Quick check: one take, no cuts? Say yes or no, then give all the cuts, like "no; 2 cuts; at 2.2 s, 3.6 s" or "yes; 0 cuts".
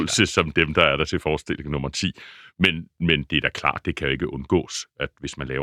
yes; 0 cuts